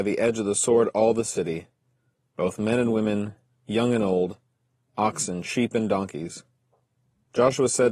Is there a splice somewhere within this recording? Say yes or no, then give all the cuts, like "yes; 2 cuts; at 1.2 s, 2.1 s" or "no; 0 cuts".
no; 0 cuts